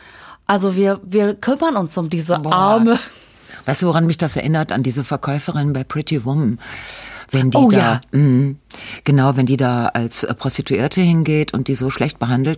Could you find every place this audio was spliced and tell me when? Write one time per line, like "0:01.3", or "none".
none